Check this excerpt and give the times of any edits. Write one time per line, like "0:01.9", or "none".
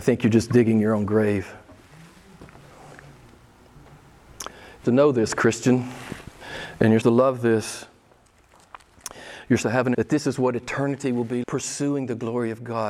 0:04.8
0:07.0
0:09.6
0:09.9
0:11.4